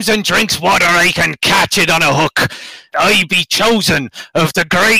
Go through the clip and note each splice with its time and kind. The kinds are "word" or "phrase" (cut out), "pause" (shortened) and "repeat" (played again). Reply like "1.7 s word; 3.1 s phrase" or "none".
none